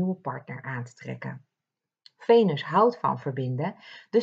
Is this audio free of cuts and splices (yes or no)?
yes